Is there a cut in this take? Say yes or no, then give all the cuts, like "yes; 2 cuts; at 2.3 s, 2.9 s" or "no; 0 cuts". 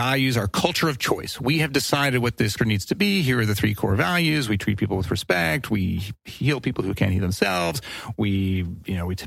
yes; 1 cut; at 2.6 s